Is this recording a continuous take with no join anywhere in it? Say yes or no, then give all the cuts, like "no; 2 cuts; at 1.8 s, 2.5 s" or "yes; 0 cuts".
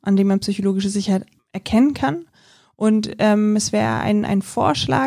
yes; 0 cuts